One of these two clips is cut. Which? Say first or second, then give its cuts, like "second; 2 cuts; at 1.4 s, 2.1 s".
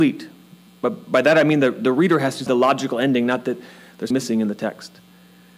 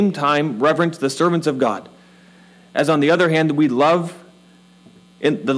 first; 2 cuts; at 2.5 s, 4.1 s